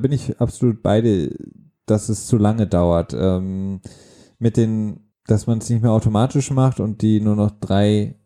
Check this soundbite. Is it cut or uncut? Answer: uncut